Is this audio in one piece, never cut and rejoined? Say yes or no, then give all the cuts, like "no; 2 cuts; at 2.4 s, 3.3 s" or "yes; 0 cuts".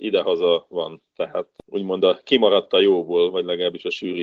yes; 0 cuts